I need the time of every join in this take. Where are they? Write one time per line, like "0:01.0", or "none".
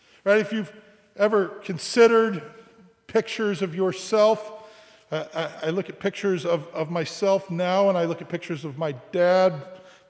none